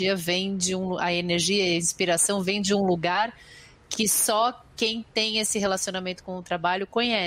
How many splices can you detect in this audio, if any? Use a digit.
0